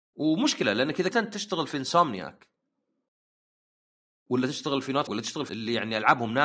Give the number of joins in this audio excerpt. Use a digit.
3